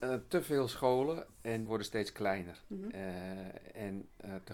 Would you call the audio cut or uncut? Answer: cut